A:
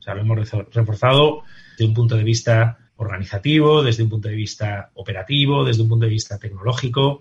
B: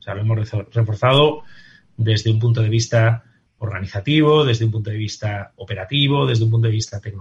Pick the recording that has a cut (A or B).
A